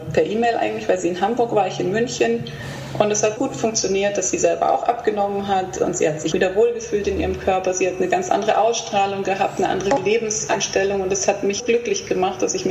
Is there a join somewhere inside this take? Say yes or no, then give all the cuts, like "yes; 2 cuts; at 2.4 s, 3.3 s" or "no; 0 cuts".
yes; 3 cuts; at 3.4 s, 6.3 s, 11.6 s